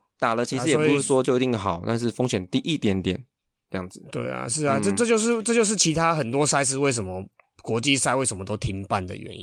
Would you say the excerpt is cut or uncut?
uncut